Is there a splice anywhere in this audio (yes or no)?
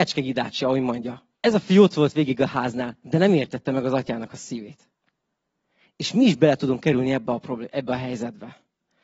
yes